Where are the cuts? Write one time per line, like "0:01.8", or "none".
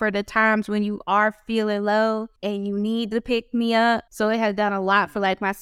0:02.4
0:04.1